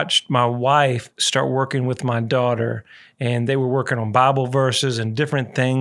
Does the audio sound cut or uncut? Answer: uncut